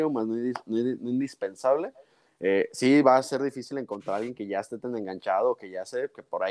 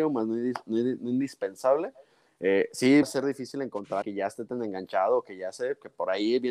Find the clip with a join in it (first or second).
second